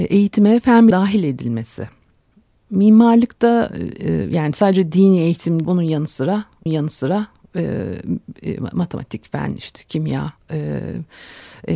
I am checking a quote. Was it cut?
yes; 3 cuts; at 0.9 s, 5.6 s, 6.7 s

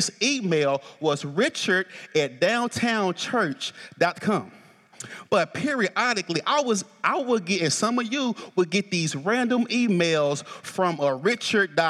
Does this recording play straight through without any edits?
yes; 0 cuts

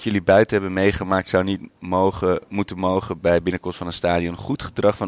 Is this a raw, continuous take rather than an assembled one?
yes; 0 cuts

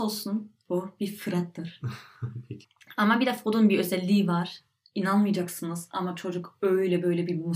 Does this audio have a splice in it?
no; 0 cuts

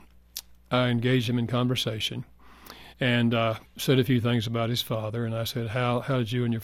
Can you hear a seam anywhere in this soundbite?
yes; 1 cut; at 2.9 s

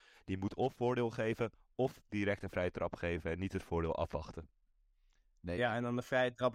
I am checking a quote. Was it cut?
no; 0 cuts

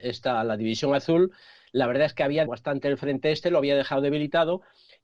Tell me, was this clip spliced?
yes; 1 cut; at 2.5 s

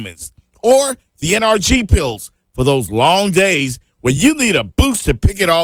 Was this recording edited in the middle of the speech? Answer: no; 0 cuts

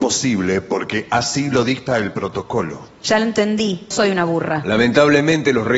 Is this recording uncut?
no; 1 cut; at 3.9 s

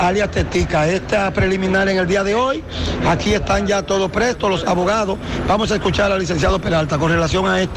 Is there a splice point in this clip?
no; 0 cuts

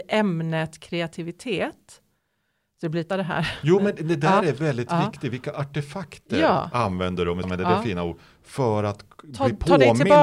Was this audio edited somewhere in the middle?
yes; 2 cuts; at 3.1 s, 7.4 s

